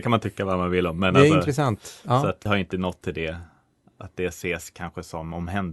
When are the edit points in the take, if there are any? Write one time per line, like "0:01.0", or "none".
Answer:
0:02.5